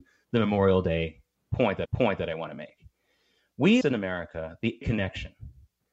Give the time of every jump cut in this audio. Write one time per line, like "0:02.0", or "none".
0:01.8
0:03.8
0:04.8

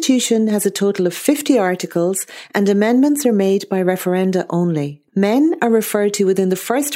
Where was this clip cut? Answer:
0:05.1

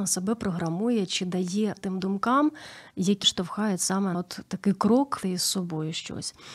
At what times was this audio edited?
0:01.8
0:03.2
0:04.1
0:05.2

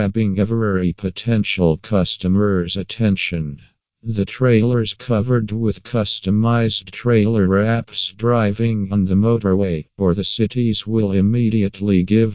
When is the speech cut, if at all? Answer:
none

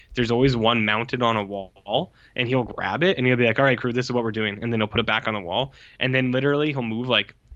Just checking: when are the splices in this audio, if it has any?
none

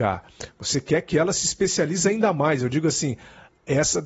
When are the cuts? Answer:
none

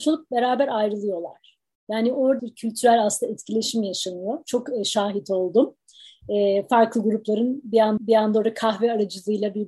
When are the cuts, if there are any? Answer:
0:02.4
0:08.0

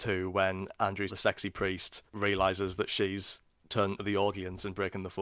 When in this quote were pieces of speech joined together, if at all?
0:01.1

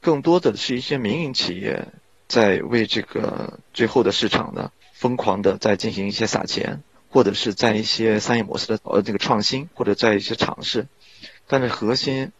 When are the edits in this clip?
0:07.0
0:09.7

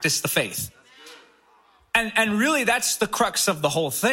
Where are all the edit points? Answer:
none

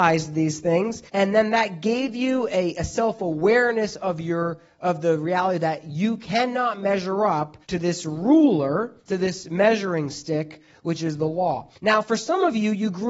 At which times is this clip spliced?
0:01.1
0:07.6
0:09.0
0:11.7

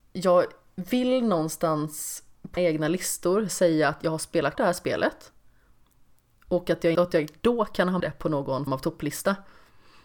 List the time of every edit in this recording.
0:02.6
0:04.5
0:06.9
0:08.0
0:08.7

